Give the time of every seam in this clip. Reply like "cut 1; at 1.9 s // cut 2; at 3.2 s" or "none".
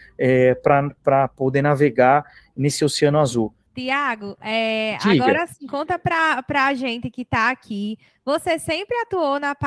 none